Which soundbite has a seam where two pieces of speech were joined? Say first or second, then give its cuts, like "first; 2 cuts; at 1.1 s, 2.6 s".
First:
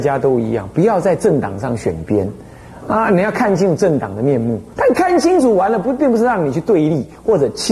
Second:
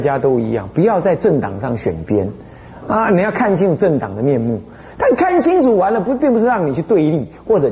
first; 1 cut; at 4.7 s